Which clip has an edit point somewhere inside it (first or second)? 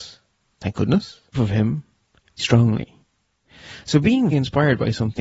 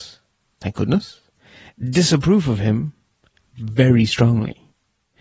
first